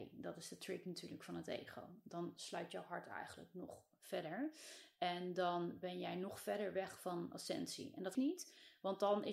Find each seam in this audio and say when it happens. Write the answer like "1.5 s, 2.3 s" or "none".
8.1 s